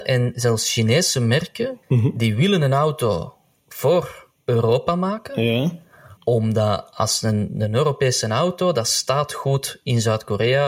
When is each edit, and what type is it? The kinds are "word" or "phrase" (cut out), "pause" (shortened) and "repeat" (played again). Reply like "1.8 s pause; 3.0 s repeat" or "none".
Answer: 1.8 s pause; 6.2 s pause